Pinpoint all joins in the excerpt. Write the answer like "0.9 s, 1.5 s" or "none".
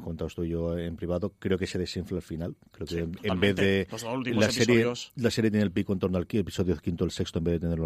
none